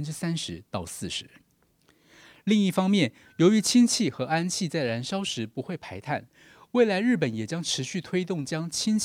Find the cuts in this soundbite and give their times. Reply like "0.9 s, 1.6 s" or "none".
none